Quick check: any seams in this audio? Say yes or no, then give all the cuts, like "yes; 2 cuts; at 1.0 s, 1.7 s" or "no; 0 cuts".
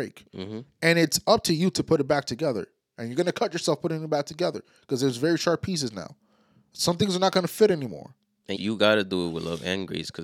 yes; 1 cut; at 8.6 s